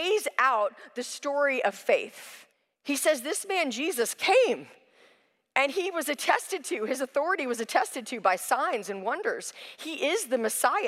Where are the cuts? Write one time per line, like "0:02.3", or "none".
0:02.5